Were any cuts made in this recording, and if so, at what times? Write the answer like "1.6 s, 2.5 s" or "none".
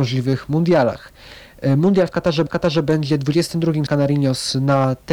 2.5 s, 3.9 s